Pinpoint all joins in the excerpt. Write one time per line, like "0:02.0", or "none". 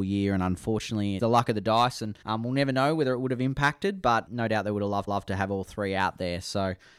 0:01.2
0:02.2
0:04.3
0:05.1